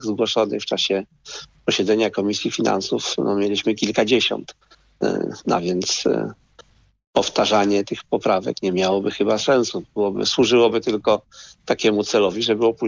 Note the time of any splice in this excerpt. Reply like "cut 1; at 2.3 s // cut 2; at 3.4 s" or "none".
none